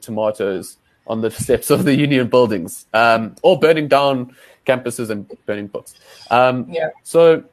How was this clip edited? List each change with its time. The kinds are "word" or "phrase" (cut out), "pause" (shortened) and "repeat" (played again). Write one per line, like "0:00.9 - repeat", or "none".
none

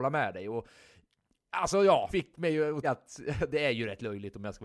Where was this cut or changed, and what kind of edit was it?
0:02.1 - word
0:02.8 - word

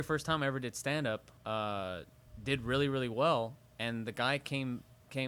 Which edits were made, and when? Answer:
0:01.4 - pause

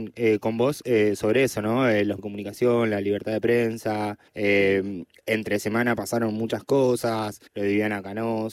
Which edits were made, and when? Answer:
0:02.2 - word
0:04.3 - pause
0:07.5 - pause

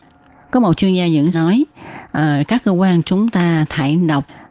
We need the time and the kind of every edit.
0:01.3 - word
0:03.0 - phrase

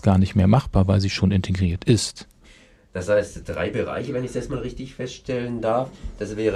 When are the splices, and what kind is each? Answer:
0:02.4 - pause

